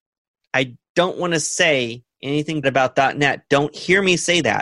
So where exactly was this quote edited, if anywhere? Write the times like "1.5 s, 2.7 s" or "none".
2.6 s